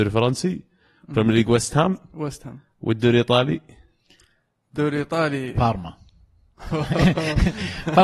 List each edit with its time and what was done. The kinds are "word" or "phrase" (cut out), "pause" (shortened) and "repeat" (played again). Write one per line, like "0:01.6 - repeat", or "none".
none